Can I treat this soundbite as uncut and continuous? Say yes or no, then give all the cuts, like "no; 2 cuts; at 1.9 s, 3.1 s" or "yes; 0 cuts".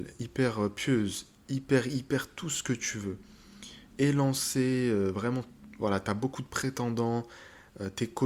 yes; 0 cuts